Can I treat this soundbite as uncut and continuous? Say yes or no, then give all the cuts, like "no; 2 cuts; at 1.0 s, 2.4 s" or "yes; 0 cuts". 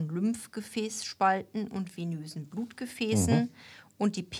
yes; 0 cuts